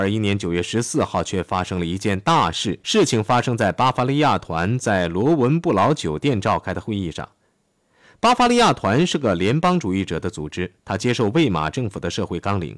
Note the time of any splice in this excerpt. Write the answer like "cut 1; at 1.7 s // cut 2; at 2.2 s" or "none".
cut 1; at 2.8 s